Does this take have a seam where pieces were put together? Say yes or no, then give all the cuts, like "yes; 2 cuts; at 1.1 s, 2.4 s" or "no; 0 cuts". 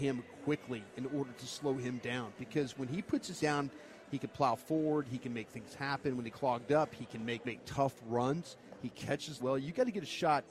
yes; 4 cuts; at 3.4 s, 6.3 s, 7.4 s, 9.4 s